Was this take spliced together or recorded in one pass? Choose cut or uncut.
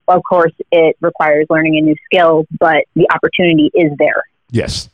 uncut